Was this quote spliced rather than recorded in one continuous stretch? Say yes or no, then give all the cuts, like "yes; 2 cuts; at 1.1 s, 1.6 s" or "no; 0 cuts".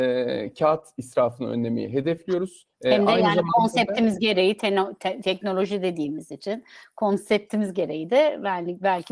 yes; 1 cut; at 2.7 s